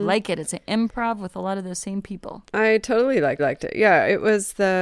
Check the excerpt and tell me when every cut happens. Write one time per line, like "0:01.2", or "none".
0:03.4